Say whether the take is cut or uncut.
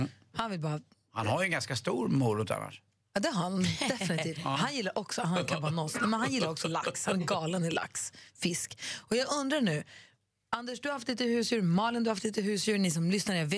uncut